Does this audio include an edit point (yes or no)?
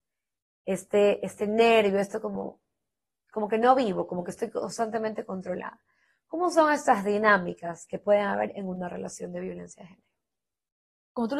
no